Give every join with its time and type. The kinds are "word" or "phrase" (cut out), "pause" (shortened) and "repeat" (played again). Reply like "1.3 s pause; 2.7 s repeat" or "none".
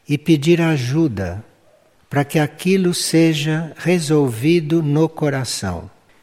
none